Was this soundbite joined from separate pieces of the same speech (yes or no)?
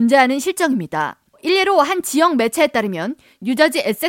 no